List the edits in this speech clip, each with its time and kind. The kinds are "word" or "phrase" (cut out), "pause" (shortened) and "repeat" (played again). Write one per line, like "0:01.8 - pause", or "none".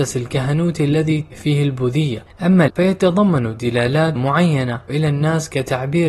0:01.3 - word
0:02.7 - word
0:04.2 - word
0:04.9 - word